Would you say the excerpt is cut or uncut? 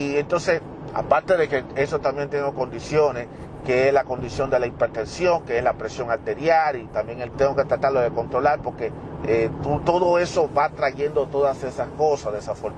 cut